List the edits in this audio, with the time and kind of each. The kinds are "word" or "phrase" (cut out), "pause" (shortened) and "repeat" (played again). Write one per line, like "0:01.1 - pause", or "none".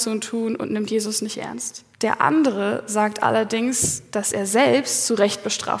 0:01.9 - pause